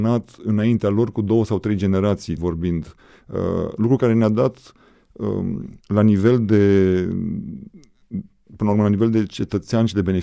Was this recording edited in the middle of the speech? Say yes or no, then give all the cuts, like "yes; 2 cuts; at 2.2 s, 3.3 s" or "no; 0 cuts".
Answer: yes; 2 cuts; at 2.4 s, 5.8 s